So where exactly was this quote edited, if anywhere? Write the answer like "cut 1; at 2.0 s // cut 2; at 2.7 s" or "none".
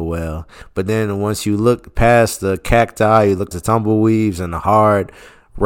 cut 1; at 3.5 s